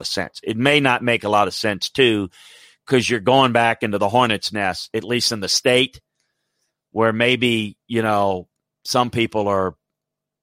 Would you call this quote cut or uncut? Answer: uncut